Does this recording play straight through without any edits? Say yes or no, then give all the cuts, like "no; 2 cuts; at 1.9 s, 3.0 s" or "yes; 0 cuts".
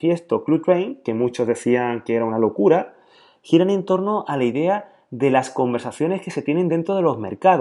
yes; 0 cuts